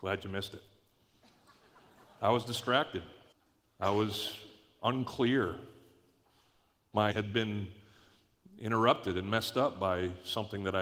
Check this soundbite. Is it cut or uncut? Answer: cut